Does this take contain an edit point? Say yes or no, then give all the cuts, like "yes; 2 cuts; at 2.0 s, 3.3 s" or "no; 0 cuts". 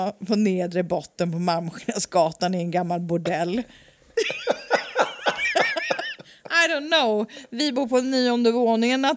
no; 0 cuts